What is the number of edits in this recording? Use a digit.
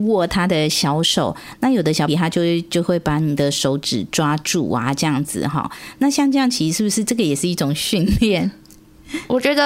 1